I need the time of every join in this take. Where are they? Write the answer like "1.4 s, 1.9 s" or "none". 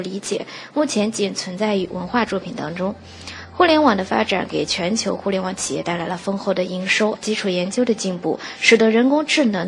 7.1 s